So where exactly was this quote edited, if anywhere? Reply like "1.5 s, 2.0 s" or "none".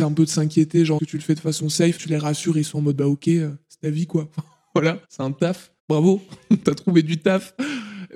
1.0 s, 2.0 s, 5.0 s, 5.8 s